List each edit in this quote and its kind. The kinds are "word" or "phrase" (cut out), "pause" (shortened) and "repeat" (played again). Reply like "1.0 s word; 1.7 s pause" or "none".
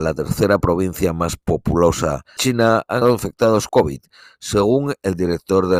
2.4 s word; 3.0 s word; 3.7 s word